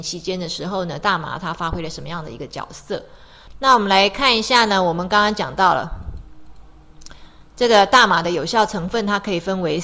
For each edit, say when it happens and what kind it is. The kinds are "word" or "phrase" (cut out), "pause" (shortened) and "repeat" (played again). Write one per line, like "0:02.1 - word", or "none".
none